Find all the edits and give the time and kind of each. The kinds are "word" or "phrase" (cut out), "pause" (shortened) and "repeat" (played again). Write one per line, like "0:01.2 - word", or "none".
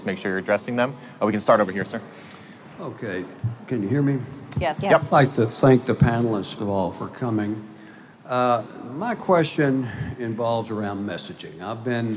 0:06.6 - word
0:08.1 - pause